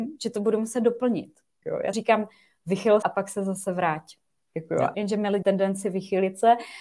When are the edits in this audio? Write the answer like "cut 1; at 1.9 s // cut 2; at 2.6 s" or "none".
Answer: cut 1; at 1.6 s // cut 2; at 1.9 s // cut 3; at 3.0 s // cut 4; at 4.9 s // cut 5; at 5.4 s